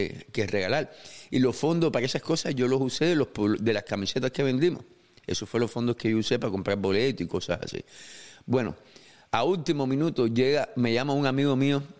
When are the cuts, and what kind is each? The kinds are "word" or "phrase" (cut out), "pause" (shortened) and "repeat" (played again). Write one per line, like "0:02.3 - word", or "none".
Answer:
none